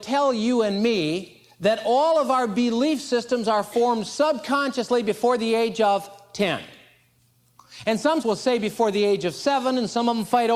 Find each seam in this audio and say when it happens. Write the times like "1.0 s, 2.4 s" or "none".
8.2 s